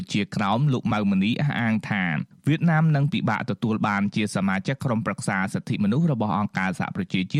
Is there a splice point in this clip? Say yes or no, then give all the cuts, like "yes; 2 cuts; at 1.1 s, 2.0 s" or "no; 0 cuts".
no; 0 cuts